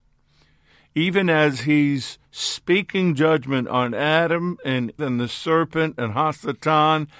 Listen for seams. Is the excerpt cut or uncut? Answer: cut